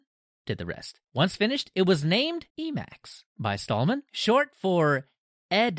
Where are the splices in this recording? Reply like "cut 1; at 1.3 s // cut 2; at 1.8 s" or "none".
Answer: cut 1; at 1.1 s // cut 2; at 2.5 s // cut 3; at 4.1 s